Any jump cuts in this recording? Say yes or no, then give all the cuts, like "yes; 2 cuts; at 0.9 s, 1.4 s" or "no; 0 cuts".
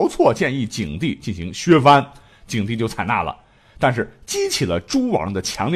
no; 0 cuts